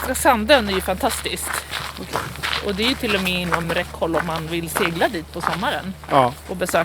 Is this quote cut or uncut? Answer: uncut